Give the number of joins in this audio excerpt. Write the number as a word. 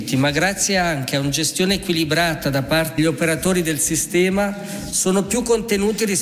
one